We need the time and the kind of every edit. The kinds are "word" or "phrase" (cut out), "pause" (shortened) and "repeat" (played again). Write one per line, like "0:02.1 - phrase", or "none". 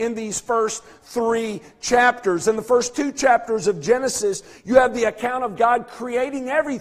none